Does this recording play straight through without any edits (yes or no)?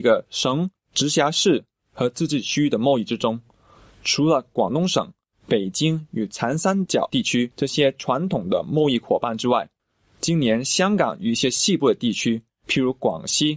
yes